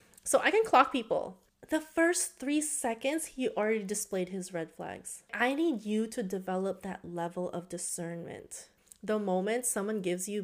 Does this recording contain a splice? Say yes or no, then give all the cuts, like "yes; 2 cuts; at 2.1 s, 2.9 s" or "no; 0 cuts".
no; 0 cuts